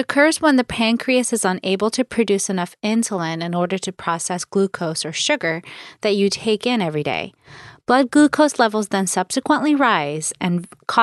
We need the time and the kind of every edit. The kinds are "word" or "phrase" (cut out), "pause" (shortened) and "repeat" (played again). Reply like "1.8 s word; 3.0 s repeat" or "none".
none